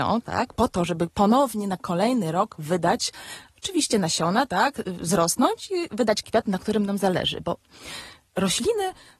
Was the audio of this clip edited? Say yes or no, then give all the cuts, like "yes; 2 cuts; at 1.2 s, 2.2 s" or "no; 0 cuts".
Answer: no; 0 cuts